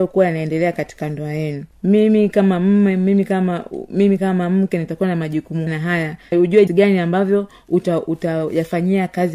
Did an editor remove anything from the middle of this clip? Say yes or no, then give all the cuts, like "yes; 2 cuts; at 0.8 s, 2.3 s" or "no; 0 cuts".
yes; 4 cuts; at 1.7 s, 5.7 s, 6.3 s, 6.7 s